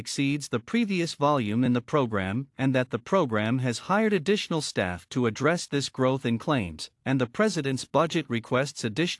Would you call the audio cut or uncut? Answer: uncut